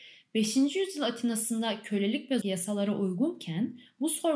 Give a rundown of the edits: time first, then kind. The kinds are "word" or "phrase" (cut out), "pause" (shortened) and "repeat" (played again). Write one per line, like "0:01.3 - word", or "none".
0:02.4 - word